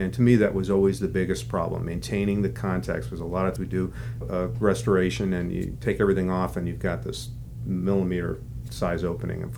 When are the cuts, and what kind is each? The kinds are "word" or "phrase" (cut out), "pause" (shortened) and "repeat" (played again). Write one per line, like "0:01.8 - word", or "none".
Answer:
0:03.6 - word
0:04.2 - word